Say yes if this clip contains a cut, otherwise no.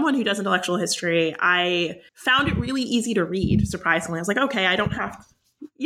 yes